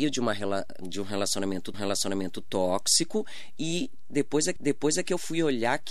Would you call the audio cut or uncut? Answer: cut